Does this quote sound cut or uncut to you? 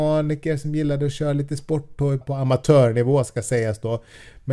cut